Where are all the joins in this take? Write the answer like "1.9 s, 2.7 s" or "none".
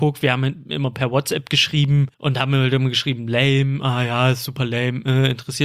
2.1 s